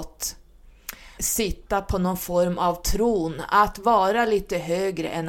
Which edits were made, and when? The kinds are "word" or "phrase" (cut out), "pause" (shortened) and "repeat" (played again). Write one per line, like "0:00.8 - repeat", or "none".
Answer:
0:01.2 - word